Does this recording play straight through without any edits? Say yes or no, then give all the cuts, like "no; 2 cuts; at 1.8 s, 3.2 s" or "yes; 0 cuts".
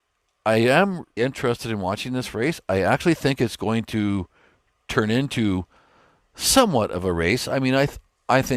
no; 1 cut; at 1.2 s